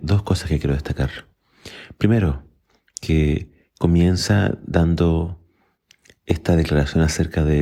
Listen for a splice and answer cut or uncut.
uncut